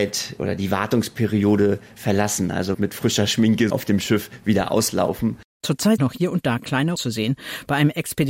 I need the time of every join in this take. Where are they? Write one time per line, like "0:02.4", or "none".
0:02.0
0:02.7
0:03.7
0:06.0
0:07.0